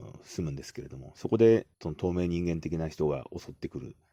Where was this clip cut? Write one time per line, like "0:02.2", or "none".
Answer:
0:01.7